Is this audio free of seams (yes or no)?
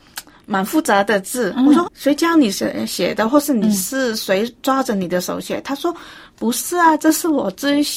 no